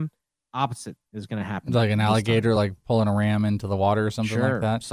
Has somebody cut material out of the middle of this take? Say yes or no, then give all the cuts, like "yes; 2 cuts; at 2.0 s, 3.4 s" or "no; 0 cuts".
no; 0 cuts